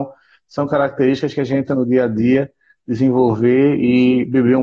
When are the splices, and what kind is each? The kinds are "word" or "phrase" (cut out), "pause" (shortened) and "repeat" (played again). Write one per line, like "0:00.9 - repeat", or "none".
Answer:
0:01.7 - word

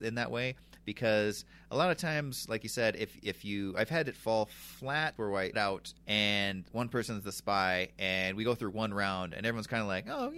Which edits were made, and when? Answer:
0:05.2 - phrase
0:05.5 - phrase
0:06.0 - pause

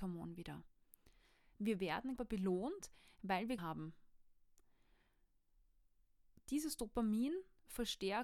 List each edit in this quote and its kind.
0:02.2 - phrase
0:03.6 - word

